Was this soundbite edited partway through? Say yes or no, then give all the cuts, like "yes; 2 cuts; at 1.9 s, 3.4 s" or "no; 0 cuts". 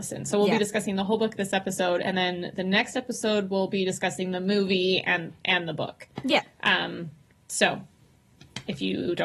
no; 0 cuts